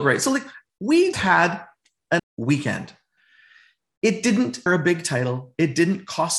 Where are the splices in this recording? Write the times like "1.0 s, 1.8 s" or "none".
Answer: 1.1 s, 2.2 s, 4.7 s